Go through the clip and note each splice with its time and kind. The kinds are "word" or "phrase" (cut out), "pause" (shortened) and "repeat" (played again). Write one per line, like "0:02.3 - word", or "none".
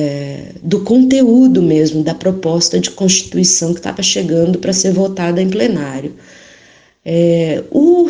none